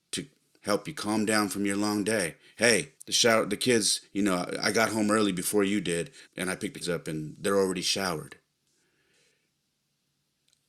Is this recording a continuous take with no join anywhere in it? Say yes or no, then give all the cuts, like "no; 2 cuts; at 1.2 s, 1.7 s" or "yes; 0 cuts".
no; 3 cuts; at 2.9 s, 6.2 s, 6.8 s